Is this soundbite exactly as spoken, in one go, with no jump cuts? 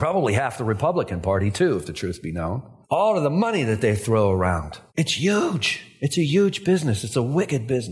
no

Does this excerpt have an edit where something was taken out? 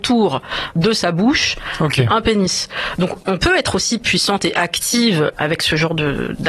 yes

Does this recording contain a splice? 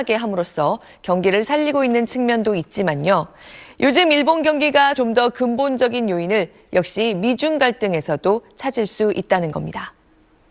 yes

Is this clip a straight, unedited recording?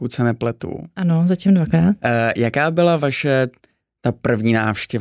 yes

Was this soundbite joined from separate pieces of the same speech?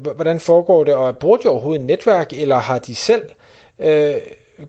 no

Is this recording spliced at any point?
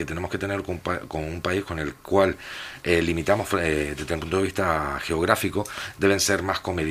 no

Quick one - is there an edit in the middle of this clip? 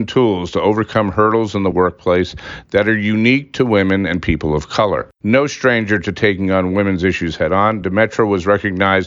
no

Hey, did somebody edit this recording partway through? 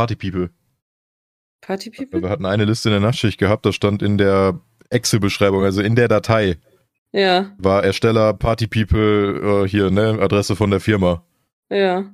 no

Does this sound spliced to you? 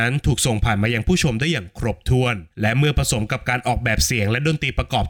yes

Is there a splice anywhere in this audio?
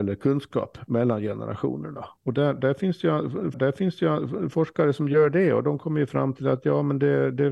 yes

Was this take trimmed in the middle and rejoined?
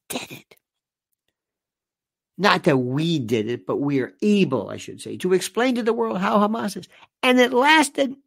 no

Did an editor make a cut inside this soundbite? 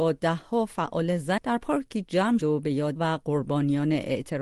yes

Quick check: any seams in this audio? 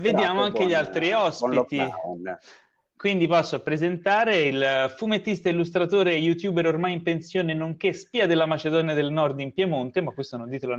no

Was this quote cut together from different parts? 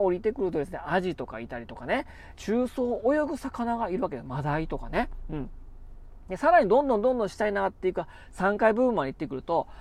yes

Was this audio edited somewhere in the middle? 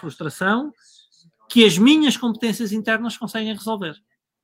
no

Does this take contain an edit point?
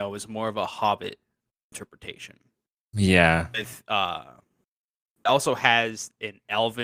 no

